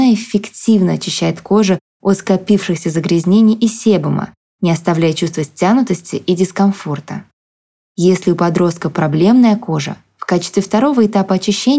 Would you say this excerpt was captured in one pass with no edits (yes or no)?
yes